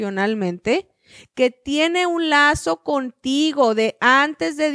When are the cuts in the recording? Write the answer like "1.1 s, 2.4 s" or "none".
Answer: none